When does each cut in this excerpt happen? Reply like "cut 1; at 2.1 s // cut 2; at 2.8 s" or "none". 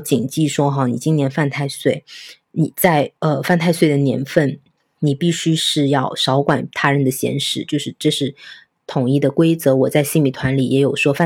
cut 1; at 3.2 s